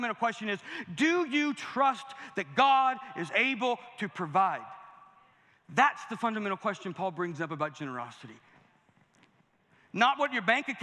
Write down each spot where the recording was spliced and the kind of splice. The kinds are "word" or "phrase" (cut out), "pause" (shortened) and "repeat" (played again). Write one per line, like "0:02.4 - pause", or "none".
none

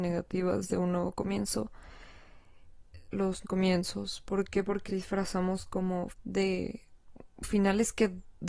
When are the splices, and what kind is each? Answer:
0:03.1 - word
0:03.4 - word
0:04.9 - word
0:06.1 - word

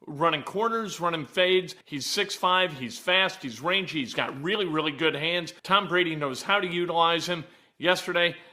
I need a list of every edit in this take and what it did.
0:01.8 - pause
0:05.6 - pause

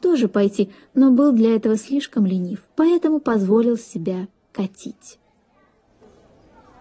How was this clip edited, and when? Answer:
0:02.7 - pause

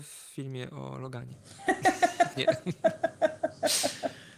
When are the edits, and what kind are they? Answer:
0:02.4 - word

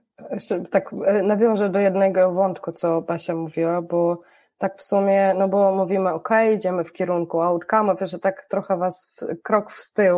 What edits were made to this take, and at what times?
none

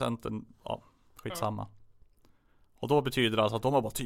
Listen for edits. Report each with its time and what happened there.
none

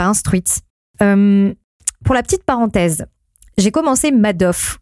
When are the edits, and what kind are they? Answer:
none

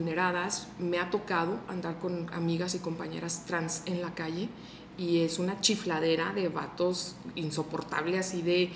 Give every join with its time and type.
none

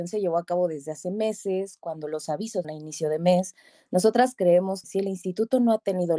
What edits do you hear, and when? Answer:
0:02.6 - phrase
0:04.8 - word

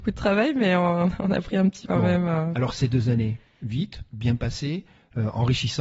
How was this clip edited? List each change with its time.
0:01.8 - word

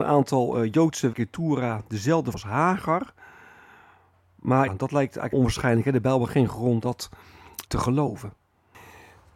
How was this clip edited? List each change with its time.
0:01.1 - word
0:02.3 - word
0:04.7 - word
0:05.3 - word
0:06.3 - word
0:06.8 - word
0:07.7 - word

